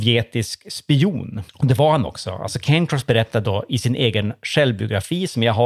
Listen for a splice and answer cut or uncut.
cut